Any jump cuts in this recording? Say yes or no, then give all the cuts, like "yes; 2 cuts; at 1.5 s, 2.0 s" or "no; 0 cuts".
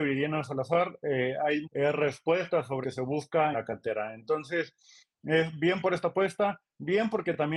yes; 3 cuts; at 1.6 s, 2.8 s, 3.5 s